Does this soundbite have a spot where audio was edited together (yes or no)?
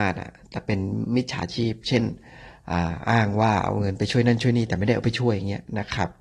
no